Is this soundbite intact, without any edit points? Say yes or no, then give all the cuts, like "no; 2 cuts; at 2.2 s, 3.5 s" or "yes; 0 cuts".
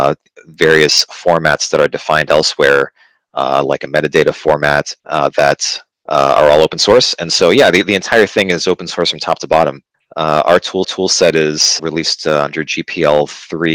no; 5 cuts; at 5.0 s, 5.9 s, 9.9 s, 10.8 s, 11.8 s